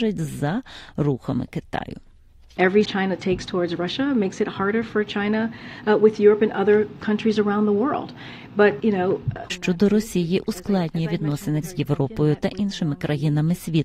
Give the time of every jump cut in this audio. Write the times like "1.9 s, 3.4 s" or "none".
2.8 s, 8.8 s, 9.5 s, 11.6 s